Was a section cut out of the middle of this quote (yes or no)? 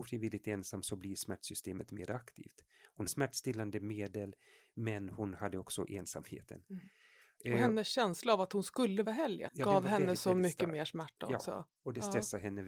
yes